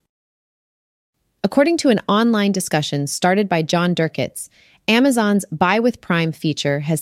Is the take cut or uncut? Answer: uncut